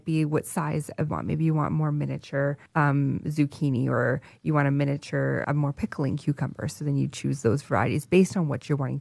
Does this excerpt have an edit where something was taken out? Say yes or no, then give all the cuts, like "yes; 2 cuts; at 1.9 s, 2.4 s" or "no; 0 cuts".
yes; 3 cuts; at 1.1 s, 2.7 s, 5.4 s